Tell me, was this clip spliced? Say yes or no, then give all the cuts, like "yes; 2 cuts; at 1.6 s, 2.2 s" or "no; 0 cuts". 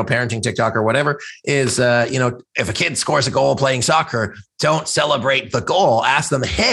no; 0 cuts